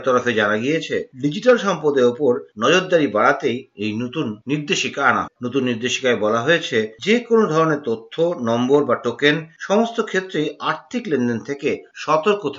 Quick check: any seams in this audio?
yes; 1 cut; at 5.3 s

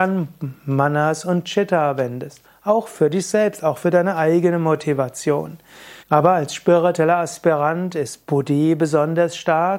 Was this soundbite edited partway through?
yes; 1 cut; at 6.0 s

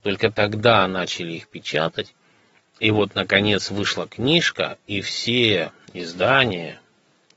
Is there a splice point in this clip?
no; 0 cuts

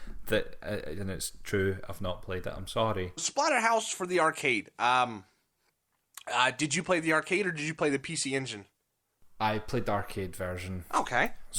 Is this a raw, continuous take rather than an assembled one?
no; 1 cut; at 3.2 s

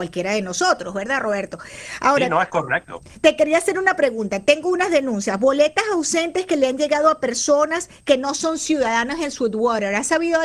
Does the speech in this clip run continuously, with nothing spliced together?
yes; 0 cuts

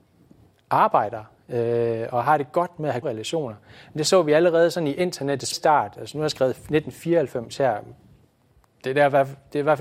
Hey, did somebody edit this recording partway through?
yes; 2 cuts; at 3.0 s, 5.5 s

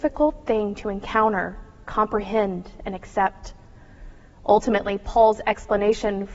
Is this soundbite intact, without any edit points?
yes; 0 cuts

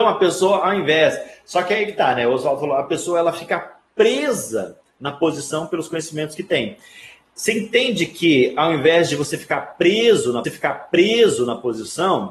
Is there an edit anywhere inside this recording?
yes; 1 cut; at 10.4 s

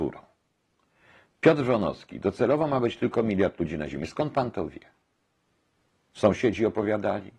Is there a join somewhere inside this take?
no; 0 cuts

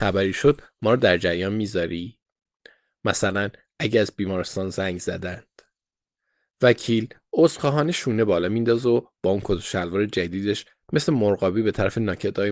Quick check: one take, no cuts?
yes; 0 cuts

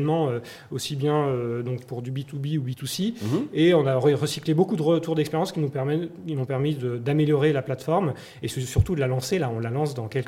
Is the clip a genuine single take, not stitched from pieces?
yes; 0 cuts

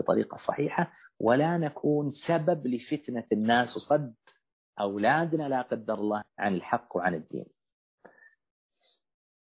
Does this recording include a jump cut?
yes; 1 cut; at 6.2 s

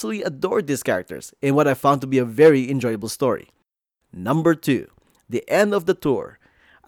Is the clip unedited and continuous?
yes; 0 cuts

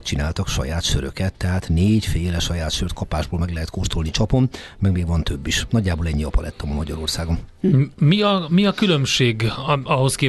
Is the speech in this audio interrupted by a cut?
yes; 1 cut; at 7.9 s

